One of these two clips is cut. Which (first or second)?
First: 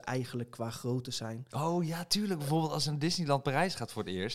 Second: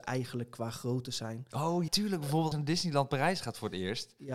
second